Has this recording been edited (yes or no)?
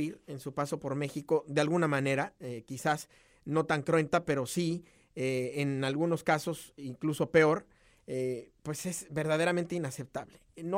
no